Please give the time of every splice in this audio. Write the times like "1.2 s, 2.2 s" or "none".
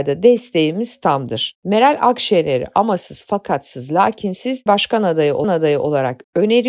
4.7 s, 5.4 s

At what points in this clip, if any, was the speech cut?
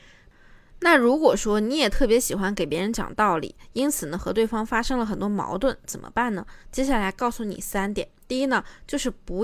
6.6 s, 8.2 s

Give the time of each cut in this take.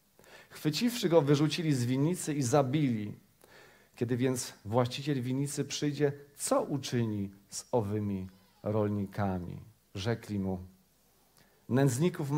none

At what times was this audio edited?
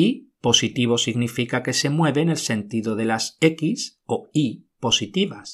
none

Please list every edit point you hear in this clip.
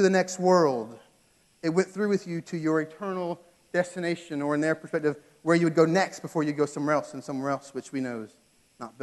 none

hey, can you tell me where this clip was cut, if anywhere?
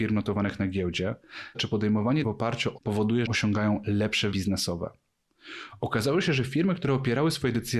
1.5 s, 2.2 s, 2.8 s, 3.3 s, 4.3 s

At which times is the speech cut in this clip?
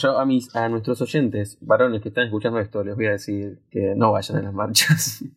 none

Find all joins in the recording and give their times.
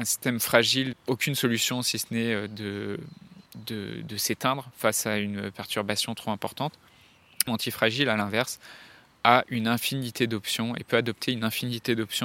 0.9 s, 3.5 s, 7.5 s

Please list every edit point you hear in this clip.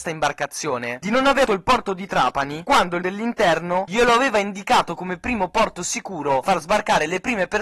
1.4 s, 3.0 s, 6.4 s

